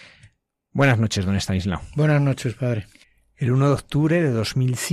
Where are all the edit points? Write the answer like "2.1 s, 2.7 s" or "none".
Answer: none